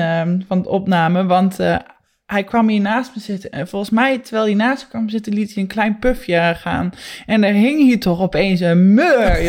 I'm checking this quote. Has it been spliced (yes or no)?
no